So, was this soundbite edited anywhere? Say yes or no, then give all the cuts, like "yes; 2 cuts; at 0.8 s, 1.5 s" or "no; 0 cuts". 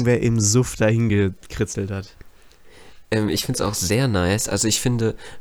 no; 0 cuts